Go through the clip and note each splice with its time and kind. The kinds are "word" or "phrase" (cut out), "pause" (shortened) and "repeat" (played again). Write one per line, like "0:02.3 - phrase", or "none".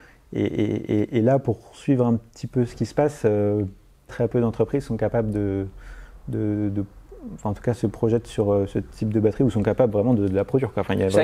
0:04.1 - word

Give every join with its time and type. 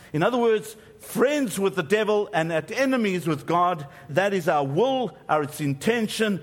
0:04.1 - word

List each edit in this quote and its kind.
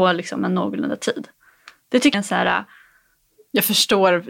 0:02.1 - word

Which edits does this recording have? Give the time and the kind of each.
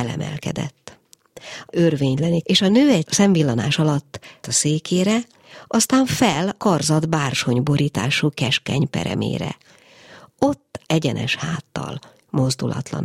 0:01.7 - word
0:02.4 - word
0:03.0 - word
0:04.4 - word
0:06.6 - word
0:10.8 - word

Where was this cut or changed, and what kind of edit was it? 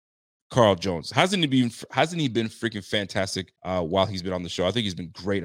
0:03.6 - pause

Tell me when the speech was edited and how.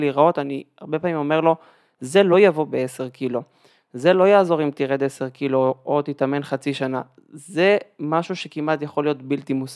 none

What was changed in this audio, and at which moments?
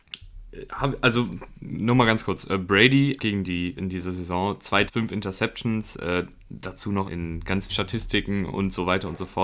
0:03.2 - word
0:03.8 - word
0:04.9 - word
0:07.1 - word
0:07.7 - phrase

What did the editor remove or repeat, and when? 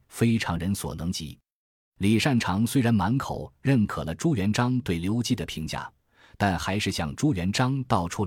none

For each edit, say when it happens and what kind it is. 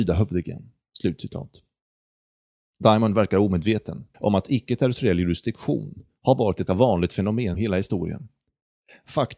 0:04.1 - pause
0:06.7 - word
0:07.5 - word

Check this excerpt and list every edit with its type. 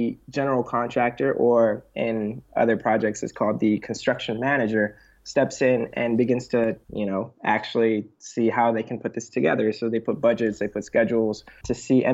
none

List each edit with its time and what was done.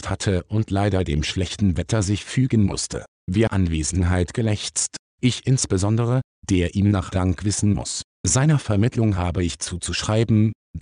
0:03.5 - phrase
0:07.1 - phrase

